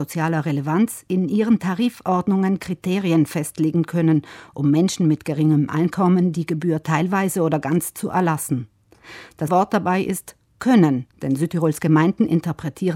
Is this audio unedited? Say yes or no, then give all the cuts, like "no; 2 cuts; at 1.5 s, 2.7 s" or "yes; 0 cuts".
no; 2 cuts; at 9.5 s, 11.1 s